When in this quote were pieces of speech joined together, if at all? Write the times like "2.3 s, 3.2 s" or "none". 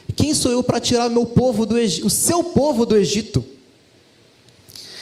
none